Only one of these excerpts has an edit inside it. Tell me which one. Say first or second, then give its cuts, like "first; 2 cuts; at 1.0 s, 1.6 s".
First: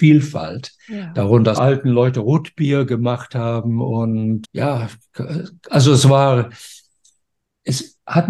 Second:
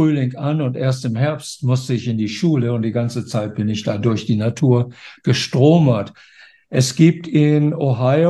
first; 2 cuts; at 1.5 s, 4.4 s